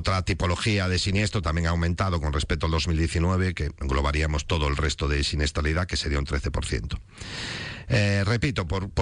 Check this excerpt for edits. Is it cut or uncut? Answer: cut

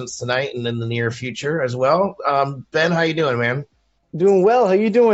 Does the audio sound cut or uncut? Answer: uncut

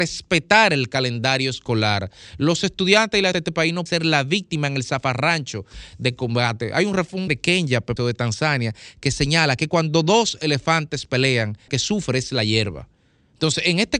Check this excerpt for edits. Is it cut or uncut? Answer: cut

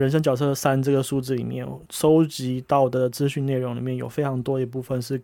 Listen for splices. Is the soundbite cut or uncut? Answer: cut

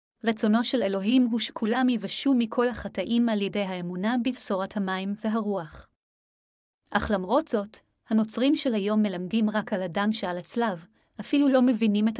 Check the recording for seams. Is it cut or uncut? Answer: uncut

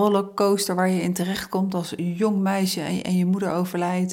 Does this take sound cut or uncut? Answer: uncut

